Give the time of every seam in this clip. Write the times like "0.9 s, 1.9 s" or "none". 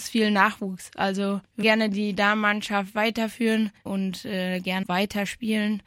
1.6 s, 3.9 s, 4.8 s